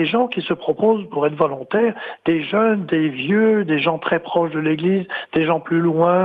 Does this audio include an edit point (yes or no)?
no